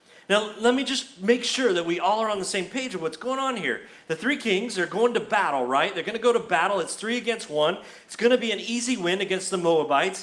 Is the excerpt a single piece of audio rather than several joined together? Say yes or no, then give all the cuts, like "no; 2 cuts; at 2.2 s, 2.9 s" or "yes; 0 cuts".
yes; 0 cuts